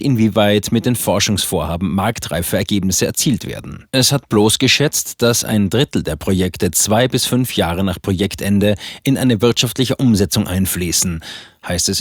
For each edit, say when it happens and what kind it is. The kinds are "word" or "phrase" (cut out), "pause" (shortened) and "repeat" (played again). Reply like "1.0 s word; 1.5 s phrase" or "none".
3.9 s pause